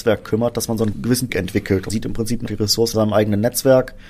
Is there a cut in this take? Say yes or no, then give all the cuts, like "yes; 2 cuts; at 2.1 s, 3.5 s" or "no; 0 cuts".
yes; 5 cuts; at 0.9 s, 1.3 s, 1.9 s, 2.5 s, 2.9 s